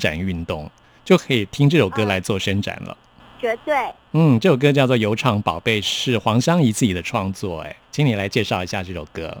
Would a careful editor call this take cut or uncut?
cut